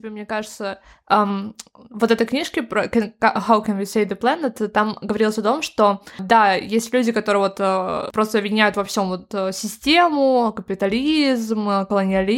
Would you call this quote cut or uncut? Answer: uncut